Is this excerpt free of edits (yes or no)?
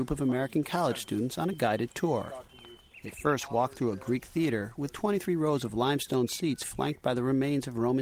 yes